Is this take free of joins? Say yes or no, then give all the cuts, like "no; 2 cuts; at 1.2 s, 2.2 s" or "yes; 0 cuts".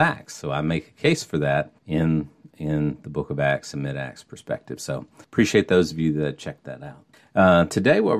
no; 3 cuts; at 1.8 s, 5.2 s, 7.1 s